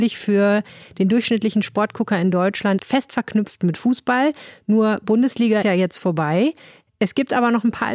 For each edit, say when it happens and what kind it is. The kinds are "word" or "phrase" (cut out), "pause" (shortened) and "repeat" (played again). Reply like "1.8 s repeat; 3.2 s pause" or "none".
2.8 s word; 5.6 s word